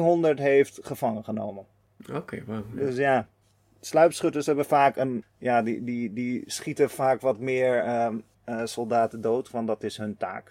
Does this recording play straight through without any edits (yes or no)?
yes